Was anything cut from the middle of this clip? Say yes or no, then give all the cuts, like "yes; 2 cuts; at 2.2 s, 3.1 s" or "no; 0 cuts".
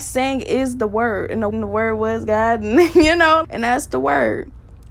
yes; 2 cuts; at 1.5 s, 3.4 s